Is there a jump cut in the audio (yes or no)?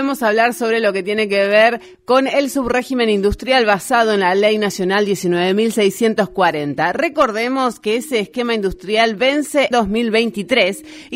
yes